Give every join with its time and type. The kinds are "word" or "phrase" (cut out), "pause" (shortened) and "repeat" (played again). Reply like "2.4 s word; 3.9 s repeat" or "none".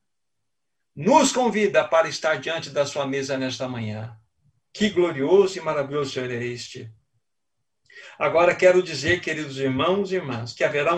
none

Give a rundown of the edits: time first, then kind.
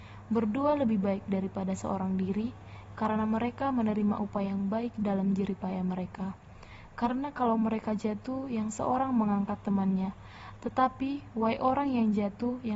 none

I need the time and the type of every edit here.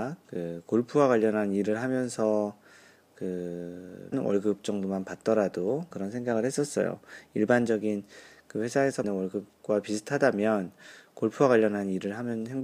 4.1 s word; 5.9 s word; 9.0 s word

